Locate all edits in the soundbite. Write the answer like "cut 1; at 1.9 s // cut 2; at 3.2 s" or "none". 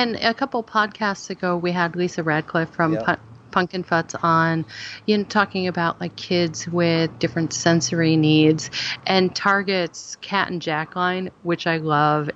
cut 1; at 7.2 s